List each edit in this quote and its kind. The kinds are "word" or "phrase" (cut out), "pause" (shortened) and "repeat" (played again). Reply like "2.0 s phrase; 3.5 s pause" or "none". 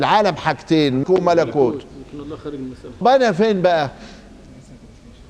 1.0 s word; 3.0 s word